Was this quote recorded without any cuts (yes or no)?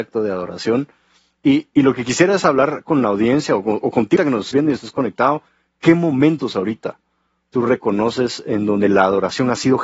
no